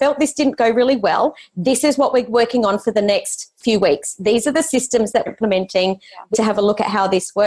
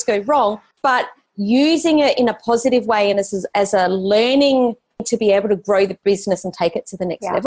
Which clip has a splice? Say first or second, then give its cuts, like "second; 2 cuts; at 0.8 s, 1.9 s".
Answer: first; 2 cuts; at 5.3 s, 6.3 s